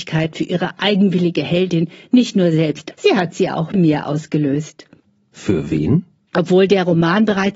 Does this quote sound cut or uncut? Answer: cut